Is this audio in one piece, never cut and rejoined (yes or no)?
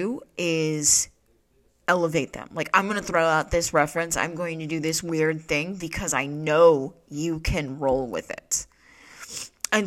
yes